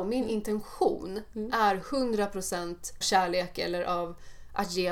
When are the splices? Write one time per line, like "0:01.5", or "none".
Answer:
0:03.0